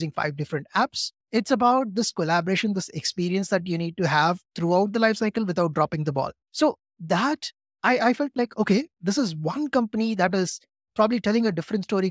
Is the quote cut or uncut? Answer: cut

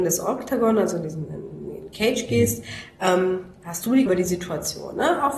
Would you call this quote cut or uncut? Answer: cut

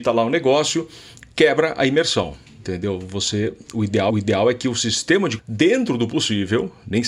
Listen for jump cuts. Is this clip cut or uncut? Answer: cut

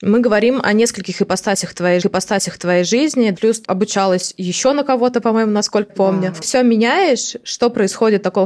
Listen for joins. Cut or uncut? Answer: cut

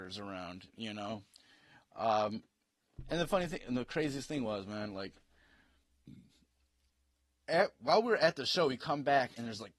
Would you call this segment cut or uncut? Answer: uncut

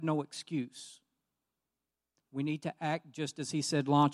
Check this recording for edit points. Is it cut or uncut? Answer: uncut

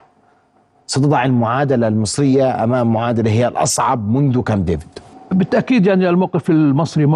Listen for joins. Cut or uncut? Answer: uncut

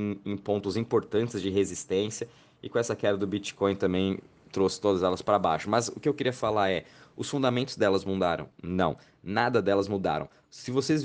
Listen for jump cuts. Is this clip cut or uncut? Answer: uncut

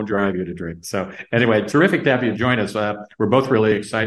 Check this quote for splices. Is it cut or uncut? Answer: uncut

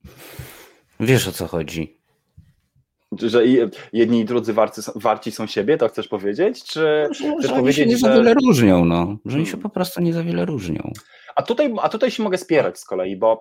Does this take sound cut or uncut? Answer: cut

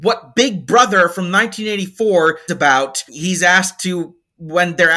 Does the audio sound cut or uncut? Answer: cut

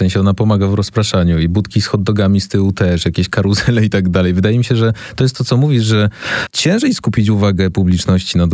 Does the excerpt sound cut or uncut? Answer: uncut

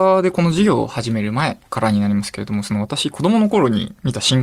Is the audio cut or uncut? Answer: cut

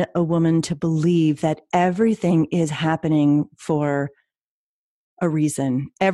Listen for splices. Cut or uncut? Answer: uncut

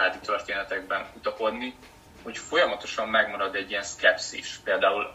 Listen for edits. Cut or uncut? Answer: cut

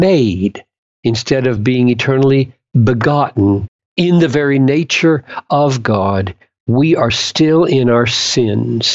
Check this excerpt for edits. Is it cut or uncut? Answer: uncut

